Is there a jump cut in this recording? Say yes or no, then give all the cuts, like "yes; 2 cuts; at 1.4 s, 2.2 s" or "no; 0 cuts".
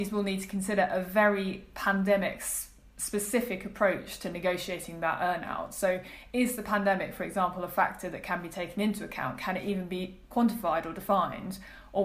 no; 0 cuts